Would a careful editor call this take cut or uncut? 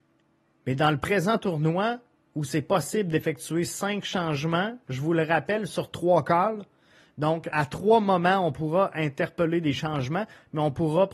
cut